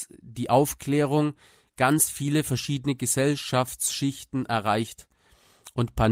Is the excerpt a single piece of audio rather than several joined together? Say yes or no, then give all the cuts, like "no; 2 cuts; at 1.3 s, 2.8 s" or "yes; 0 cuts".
yes; 0 cuts